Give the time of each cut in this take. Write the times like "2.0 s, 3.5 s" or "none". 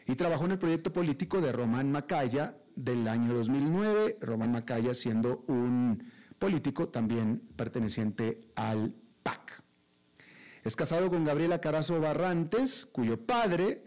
none

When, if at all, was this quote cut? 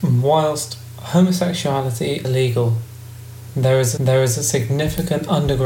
2.2 s, 4.0 s

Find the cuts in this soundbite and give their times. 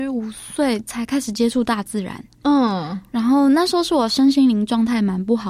none

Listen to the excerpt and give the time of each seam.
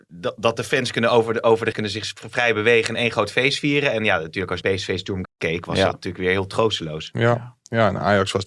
1.7 s, 4.6 s, 5.2 s

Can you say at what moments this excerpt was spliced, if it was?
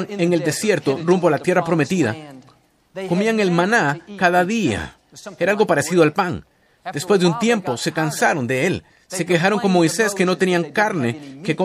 none

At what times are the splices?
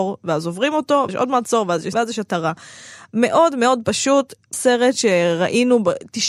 1.1 s, 1.9 s, 4.5 s

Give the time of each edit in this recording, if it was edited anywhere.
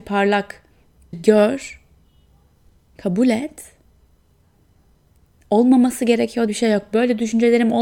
1.1 s, 6.5 s

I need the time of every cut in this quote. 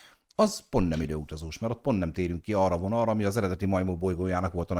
none

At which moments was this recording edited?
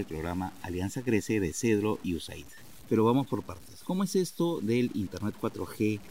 none

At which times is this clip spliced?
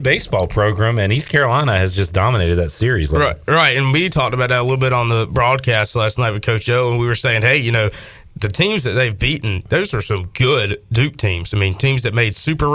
none

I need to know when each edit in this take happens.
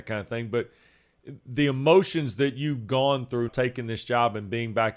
3.5 s

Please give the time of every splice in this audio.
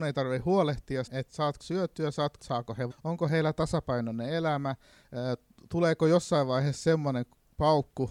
1.1 s, 1.6 s, 2.4 s, 2.9 s

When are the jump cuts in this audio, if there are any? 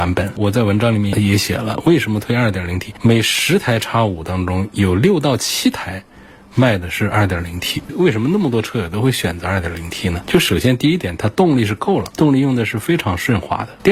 none

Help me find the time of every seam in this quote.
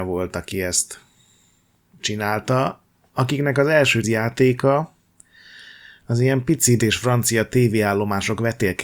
4.0 s, 6.8 s

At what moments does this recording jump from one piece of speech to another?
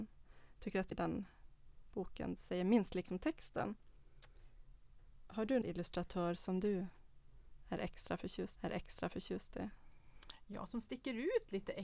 0.9 s, 2.4 s, 3.1 s, 5.6 s, 8.6 s

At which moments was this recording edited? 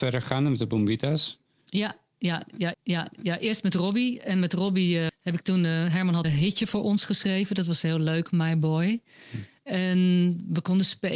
2.7 s, 5.1 s, 6.2 s

